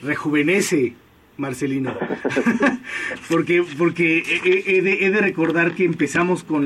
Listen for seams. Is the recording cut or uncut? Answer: uncut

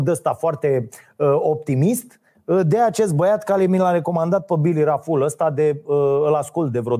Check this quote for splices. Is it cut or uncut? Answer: uncut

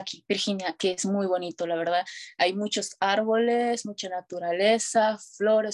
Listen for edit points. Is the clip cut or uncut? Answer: uncut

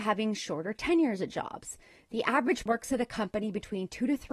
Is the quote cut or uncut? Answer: cut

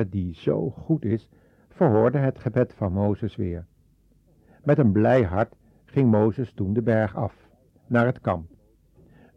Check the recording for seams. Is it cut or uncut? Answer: uncut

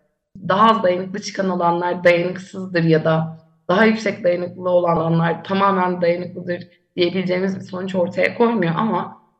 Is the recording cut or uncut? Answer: uncut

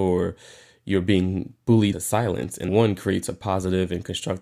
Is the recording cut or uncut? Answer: cut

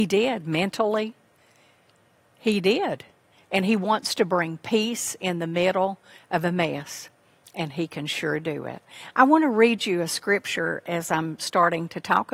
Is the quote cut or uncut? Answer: uncut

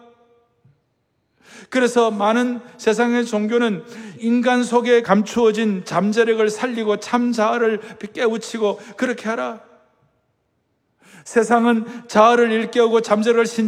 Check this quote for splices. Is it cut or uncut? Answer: uncut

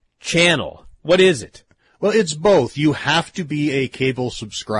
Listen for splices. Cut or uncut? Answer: uncut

